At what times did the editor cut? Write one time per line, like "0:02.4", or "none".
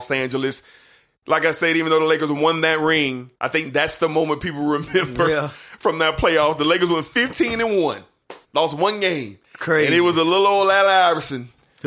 0:03.4
0:08.4
0:09.4